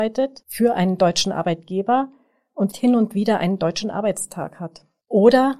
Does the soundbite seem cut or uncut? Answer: cut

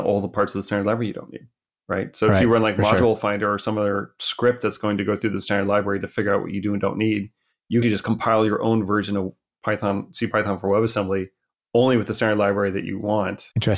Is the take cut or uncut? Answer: cut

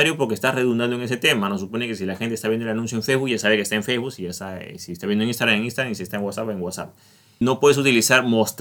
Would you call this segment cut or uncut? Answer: uncut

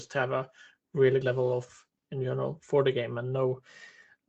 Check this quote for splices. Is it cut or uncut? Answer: cut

